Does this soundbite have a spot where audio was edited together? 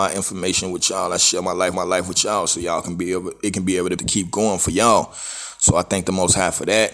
yes; 2 cuts; at 1.7 s, 4.0 s

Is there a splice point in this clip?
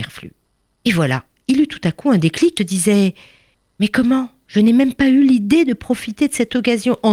yes; 1 cut; at 2.6 s

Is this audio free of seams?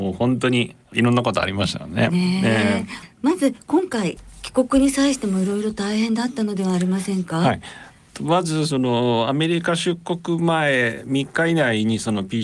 yes; 0 cuts

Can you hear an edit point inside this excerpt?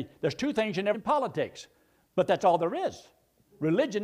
yes; 1 cut; at 0.9 s

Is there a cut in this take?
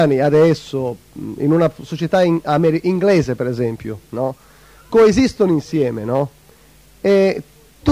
no; 0 cuts

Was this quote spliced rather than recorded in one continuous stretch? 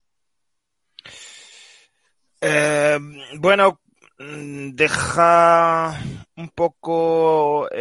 no; 0 cuts

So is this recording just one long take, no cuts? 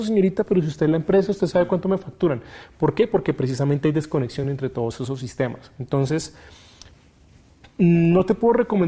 yes; 0 cuts

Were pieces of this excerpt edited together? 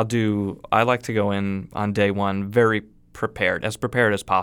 no; 0 cuts

